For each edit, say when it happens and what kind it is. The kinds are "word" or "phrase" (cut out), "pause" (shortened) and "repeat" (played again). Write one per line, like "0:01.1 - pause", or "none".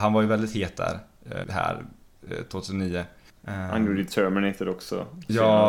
0:01.4 - word
0:03.3 - pause